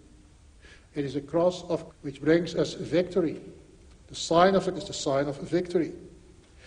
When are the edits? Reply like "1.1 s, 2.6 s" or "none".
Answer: 1.9 s, 4.7 s